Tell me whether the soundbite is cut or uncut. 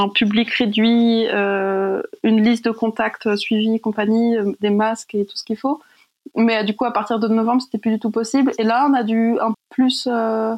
cut